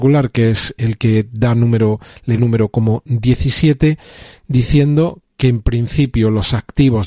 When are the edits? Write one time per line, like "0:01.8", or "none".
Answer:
0:02.4